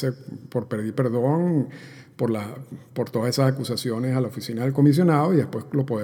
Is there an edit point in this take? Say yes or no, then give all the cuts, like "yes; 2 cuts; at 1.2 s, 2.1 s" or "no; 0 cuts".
no; 0 cuts